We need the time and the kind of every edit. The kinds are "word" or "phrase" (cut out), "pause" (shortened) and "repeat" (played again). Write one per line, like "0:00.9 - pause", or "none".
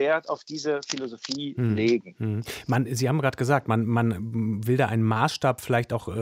none